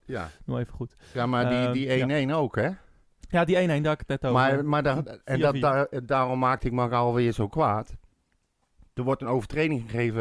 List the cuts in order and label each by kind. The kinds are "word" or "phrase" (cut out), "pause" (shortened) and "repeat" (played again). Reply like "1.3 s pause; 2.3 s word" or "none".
none